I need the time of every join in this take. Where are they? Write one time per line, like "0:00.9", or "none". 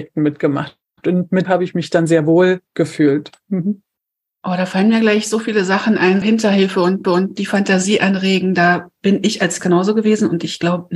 0:01.4
0:02.7
0:06.2
0:07.0
0:09.6